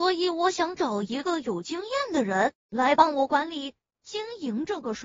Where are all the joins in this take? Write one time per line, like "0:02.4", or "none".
none